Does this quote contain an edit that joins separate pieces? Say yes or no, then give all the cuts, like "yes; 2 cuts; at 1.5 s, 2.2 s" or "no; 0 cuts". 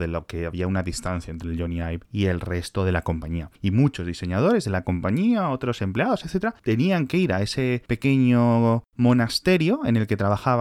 yes; 1 cut; at 8.9 s